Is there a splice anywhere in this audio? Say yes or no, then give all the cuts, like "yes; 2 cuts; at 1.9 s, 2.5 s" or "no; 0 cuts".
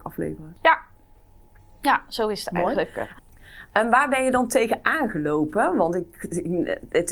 no; 0 cuts